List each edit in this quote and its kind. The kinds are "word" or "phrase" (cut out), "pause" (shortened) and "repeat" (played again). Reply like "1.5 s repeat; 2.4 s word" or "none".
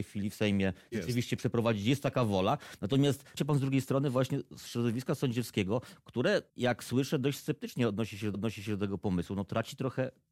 3.4 s phrase; 6.5 s pause; 8.3 s repeat